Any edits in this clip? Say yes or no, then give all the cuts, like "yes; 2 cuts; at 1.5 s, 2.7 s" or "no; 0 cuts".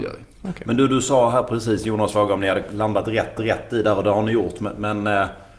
yes; 1 cut; at 3.4 s